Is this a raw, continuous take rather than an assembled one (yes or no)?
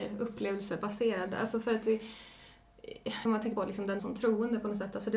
no